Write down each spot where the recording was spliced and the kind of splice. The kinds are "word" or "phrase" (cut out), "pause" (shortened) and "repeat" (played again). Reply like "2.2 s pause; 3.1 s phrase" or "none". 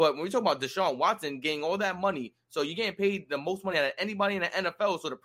none